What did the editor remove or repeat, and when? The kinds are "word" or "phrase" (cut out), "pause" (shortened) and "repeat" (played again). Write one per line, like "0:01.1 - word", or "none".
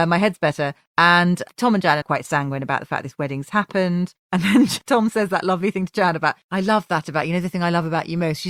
0:02.0 - word